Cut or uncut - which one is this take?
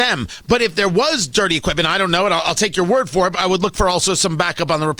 cut